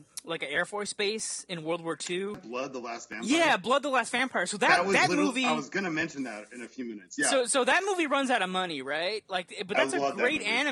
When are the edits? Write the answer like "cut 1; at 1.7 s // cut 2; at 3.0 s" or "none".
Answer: none